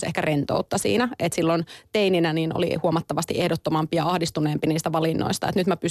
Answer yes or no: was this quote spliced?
no